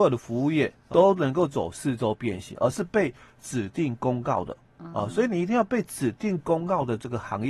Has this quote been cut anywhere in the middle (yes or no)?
yes